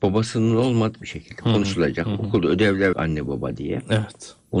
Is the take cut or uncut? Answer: cut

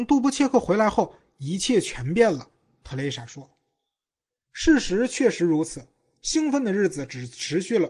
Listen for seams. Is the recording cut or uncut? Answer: uncut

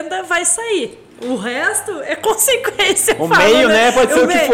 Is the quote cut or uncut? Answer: uncut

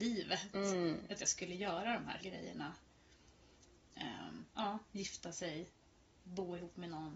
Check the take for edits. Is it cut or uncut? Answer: cut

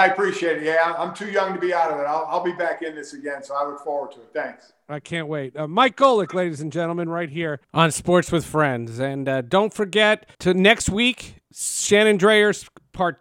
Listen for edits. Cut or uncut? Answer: cut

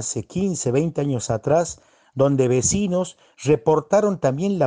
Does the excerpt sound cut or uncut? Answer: uncut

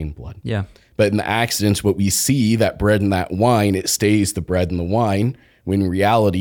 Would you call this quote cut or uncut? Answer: uncut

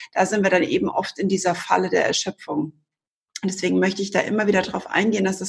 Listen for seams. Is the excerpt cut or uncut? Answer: uncut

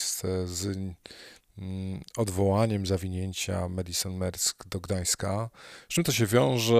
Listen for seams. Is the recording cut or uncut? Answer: uncut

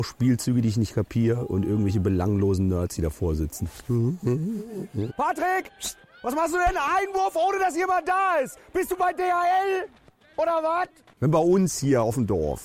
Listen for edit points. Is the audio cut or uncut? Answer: uncut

